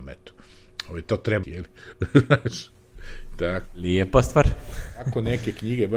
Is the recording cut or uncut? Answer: cut